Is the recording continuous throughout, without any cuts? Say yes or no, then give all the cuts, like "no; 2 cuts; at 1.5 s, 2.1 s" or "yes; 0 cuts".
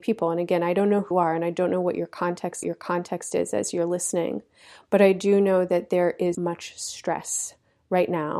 no; 3 cuts; at 1.1 s, 2.6 s, 6.3 s